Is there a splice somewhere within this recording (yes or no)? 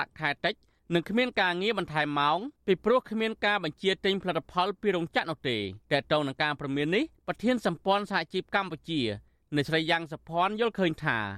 yes